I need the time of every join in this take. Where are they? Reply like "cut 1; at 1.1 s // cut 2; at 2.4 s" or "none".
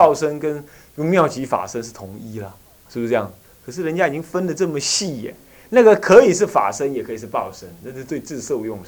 cut 1; at 2.9 s